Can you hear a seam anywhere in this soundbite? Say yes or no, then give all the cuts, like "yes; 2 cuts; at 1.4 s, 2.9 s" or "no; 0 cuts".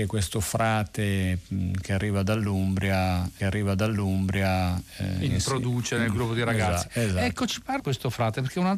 yes; 2 cuts; at 3.4 s, 7.8 s